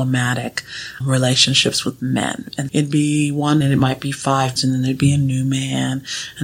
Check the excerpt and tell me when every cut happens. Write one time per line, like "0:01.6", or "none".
0:01.0
0:02.7
0:03.6
0:04.6